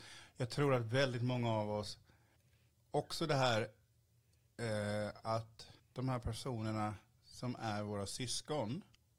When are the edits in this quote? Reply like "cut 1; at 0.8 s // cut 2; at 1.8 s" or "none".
cut 1; at 2.4 s // cut 2; at 5.8 s